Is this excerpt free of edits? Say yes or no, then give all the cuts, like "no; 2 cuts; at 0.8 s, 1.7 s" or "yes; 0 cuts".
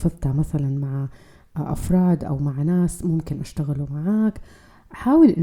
yes; 0 cuts